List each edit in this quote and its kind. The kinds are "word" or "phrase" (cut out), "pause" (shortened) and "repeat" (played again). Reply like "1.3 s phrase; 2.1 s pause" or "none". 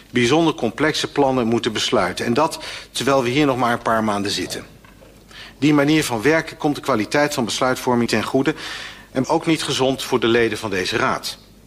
8.1 s word; 9.2 s word